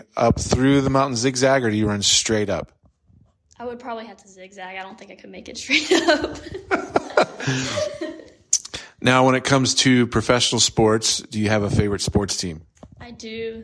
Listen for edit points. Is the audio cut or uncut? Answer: uncut